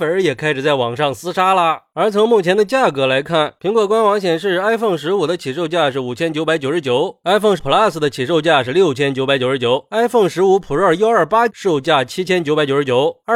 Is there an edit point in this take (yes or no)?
yes